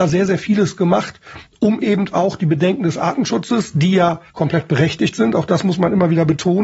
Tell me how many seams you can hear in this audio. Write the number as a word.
one